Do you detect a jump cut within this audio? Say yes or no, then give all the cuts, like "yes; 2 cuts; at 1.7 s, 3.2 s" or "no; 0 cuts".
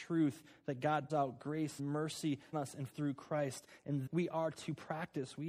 yes; 5 cuts; at 1.1 s, 1.8 s, 2.5 s, 2.9 s, 4.1 s